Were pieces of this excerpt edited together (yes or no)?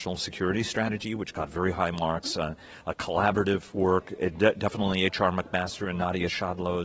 no